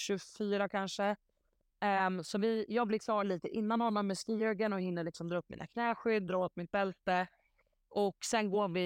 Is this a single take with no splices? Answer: yes; 0 cuts

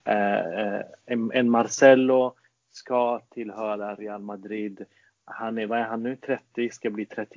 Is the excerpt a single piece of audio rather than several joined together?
yes; 0 cuts

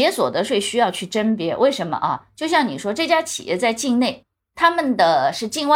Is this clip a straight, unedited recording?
yes; 0 cuts

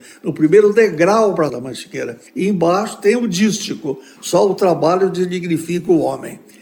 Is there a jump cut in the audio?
yes; 2 cuts; at 1.5 s, 2.3 s

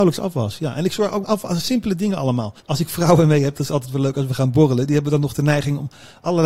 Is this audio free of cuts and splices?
no; 2 cuts; at 1.2 s, 2.6 s

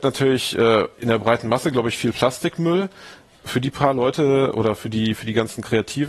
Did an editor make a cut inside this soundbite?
no; 0 cuts

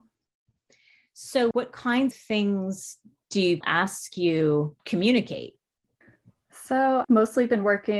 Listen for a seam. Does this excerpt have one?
yes; 5 cuts; at 1.5 s, 2.1 s, 3.6 s, 4.8 s, 7.0 s

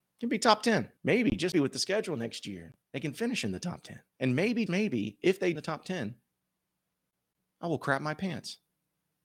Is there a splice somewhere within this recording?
yes; 6 cuts; at 1.0 s, 1.5 s, 2.8 s, 4.1 s, 4.7 s, 5.5 s

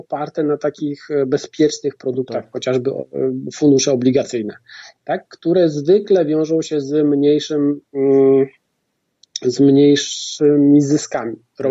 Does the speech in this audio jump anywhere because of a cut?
no; 0 cuts

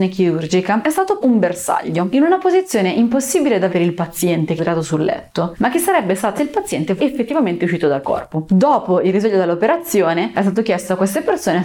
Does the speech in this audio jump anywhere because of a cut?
yes; 6 cuts; at 1.2 s, 3.7 s, 4.6 s, 6.4 s, 7.0 s, 8.0 s

